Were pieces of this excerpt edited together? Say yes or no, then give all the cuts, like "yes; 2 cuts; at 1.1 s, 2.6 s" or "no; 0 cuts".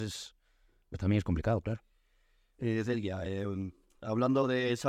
no; 0 cuts